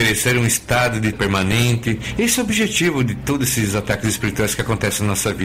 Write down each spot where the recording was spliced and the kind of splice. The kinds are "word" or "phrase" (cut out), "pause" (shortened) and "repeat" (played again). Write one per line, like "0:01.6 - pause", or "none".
0:01.1 - word